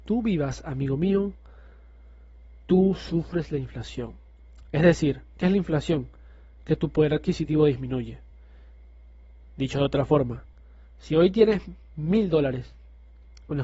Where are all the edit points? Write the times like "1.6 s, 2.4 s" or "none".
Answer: none